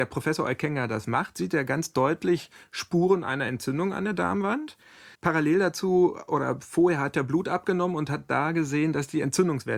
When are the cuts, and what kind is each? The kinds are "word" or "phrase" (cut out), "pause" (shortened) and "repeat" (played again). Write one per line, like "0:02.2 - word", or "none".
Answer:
0:05.1 - pause